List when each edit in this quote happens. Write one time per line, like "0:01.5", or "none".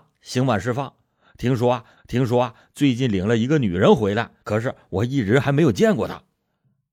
0:02.0
0:04.4